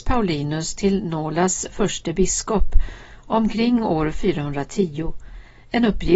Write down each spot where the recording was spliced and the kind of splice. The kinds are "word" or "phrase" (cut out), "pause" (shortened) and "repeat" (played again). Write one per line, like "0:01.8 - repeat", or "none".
none